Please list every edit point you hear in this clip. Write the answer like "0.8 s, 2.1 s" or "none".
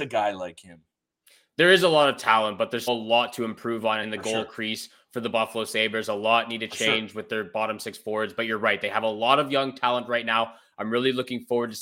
2.9 s, 4.0 s